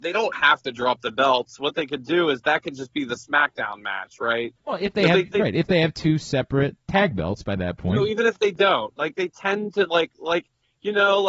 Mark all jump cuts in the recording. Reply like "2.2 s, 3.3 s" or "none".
4.6 s, 6.8 s

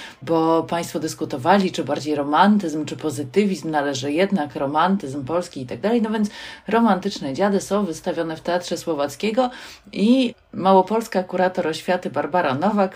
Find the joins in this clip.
none

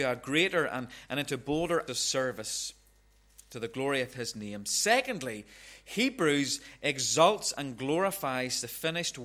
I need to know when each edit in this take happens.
1.9 s

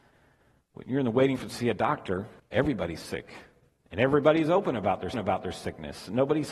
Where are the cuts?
1.4 s, 2.4 s, 5.1 s

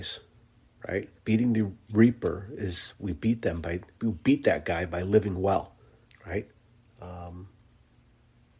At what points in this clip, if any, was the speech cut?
1.2 s, 6.0 s

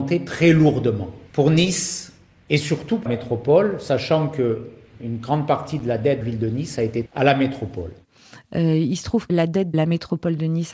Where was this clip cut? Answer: 3.1 s, 6.2 s, 7.1 s, 9.3 s, 9.7 s

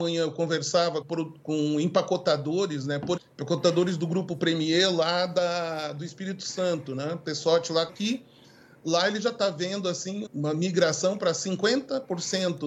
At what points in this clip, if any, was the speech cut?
1.0 s, 3.2 s, 7.9 s, 10.3 s

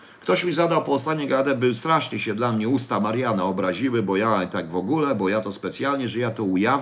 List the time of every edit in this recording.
none

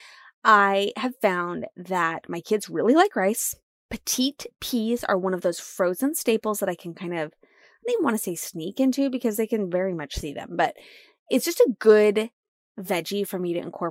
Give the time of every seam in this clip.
none

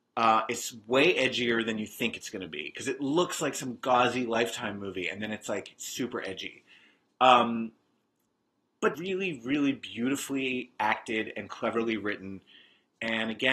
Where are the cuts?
8.9 s

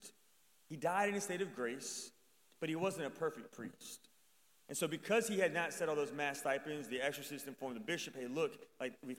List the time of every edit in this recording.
none

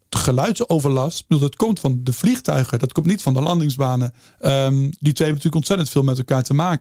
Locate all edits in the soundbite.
4.2 s

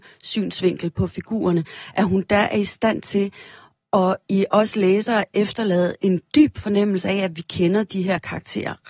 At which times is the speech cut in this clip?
none

